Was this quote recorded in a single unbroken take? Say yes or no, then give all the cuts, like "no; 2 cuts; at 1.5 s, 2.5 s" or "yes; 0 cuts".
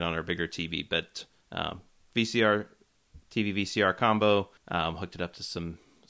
no; 1 cut; at 4.6 s